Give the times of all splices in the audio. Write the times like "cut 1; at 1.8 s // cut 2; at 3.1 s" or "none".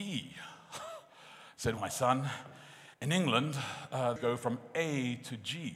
cut 1; at 1.8 s // cut 2; at 2.9 s // cut 3; at 4.2 s